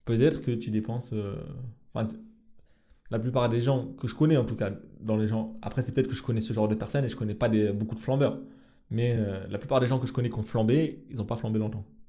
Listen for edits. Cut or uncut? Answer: uncut